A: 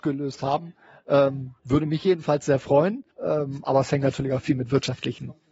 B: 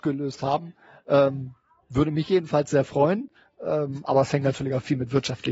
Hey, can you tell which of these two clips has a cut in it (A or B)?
A